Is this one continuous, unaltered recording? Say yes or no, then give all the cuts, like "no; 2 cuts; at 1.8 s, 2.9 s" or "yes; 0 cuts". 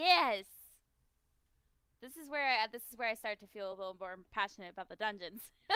yes; 0 cuts